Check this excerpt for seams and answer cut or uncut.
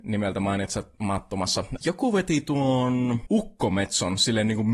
cut